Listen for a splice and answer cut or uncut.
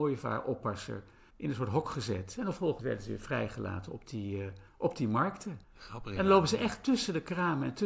cut